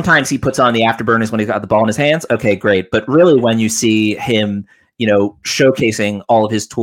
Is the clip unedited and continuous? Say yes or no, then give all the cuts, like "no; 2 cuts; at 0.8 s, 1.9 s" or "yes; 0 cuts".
yes; 0 cuts